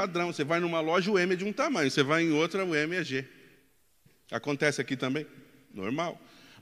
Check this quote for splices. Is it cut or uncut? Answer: uncut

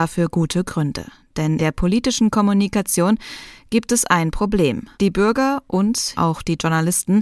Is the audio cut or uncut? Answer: cut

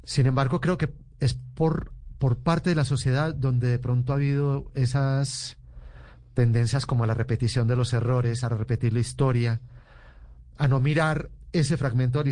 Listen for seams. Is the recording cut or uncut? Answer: uncut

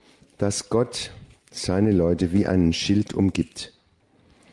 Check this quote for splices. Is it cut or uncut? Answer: uncut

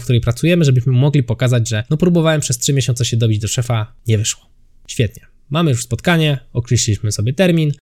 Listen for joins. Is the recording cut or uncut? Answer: uncut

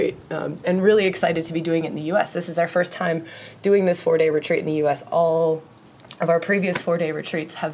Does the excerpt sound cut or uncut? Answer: uncut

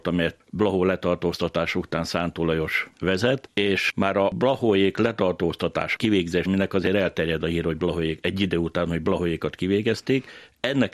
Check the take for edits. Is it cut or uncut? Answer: cut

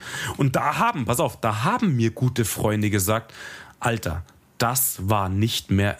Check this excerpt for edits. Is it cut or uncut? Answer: uncut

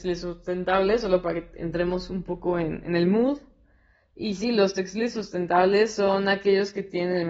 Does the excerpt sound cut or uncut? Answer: uncut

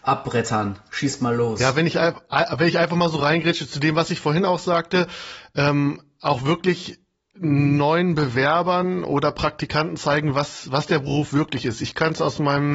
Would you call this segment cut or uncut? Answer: uncut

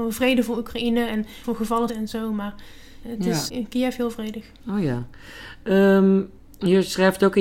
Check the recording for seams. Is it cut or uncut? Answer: cut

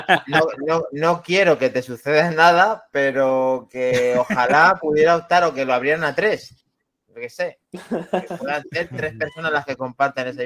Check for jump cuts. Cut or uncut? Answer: uncut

